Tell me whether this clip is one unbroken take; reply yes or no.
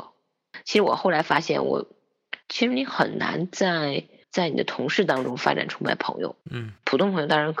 no